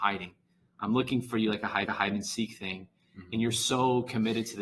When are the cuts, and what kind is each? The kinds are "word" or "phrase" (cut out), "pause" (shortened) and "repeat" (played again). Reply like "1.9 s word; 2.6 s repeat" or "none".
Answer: 1.8 s repeat